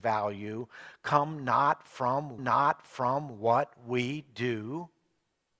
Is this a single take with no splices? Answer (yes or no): no